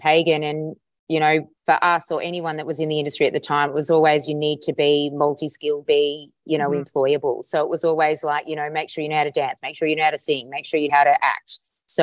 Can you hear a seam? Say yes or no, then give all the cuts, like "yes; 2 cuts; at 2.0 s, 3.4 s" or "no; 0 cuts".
yes; 3 cuts; at 1.6 s, 5.8 s, 10.9 s